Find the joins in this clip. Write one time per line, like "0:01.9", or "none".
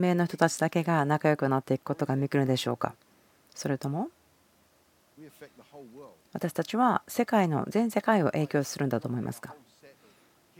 none